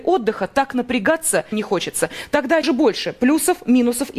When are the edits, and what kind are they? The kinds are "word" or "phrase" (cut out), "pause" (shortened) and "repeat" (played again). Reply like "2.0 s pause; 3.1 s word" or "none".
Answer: 1.5 s phrase; 2.6 s word